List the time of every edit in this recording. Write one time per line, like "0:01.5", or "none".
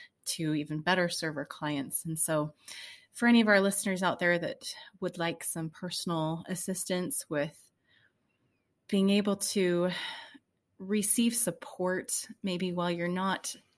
none